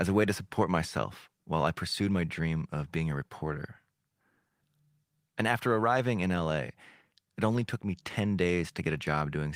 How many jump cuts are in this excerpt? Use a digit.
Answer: 0